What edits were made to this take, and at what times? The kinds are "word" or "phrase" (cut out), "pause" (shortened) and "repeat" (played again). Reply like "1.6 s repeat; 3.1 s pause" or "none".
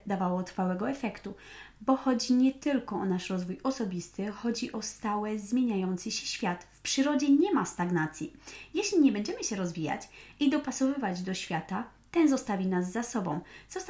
none